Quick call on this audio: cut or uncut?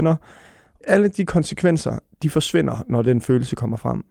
uncut